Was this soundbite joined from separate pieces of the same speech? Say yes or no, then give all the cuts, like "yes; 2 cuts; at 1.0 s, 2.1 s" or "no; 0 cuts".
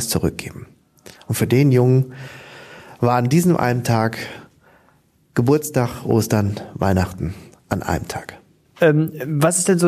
no; 0 cuts